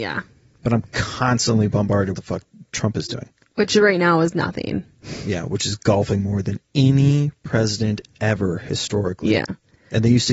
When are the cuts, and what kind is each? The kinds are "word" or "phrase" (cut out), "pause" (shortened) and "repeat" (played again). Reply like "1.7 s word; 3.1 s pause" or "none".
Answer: 2.1 s phrase; 6.6 s pause